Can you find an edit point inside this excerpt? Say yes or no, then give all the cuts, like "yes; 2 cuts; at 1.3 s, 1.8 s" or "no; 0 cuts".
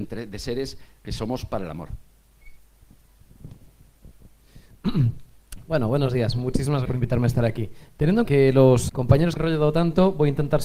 yes; 4 cuts; at 6.8 s, 8.2 s, 8.9 s, 9.4 s